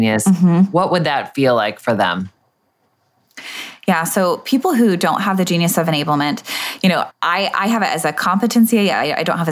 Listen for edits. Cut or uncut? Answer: cut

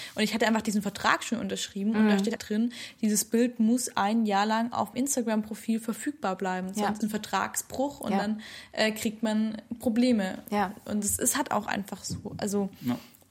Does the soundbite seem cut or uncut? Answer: cut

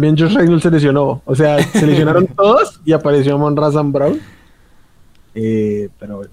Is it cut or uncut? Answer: uncut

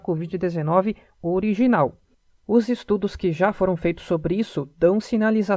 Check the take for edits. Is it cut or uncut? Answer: uncut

